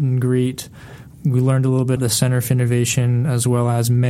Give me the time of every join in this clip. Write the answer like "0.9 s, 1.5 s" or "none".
2.0 s